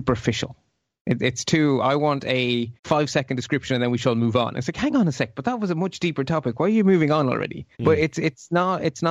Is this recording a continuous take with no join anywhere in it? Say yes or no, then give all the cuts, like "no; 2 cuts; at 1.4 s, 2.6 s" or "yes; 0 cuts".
no; 2 cuts; at 2.8 s, 7.7 s